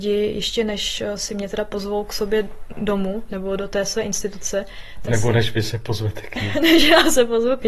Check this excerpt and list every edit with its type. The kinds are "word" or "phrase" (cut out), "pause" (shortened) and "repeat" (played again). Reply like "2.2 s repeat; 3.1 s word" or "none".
none